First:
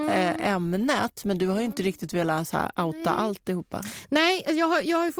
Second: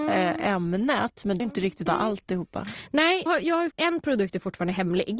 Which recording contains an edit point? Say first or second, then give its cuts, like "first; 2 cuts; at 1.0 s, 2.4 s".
second; 4 cuts; at 1.4 s, 1.9 s, 3.3 s, 3.7 s